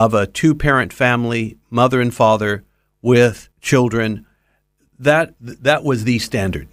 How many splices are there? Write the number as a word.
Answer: two